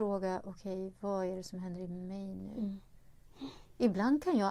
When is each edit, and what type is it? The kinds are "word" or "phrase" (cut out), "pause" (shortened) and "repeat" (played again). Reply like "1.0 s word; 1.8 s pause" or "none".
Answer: none